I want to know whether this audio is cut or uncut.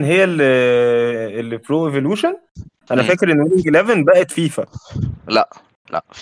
uncut